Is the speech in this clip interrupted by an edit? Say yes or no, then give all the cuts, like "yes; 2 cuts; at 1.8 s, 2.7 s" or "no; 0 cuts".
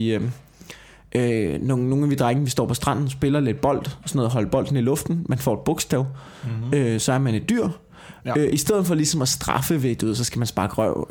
no; 0 cuts